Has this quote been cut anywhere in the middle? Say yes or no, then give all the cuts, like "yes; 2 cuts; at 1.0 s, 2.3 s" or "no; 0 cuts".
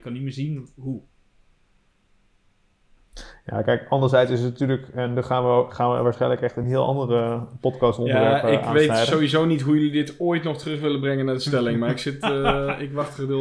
no; 0 cuts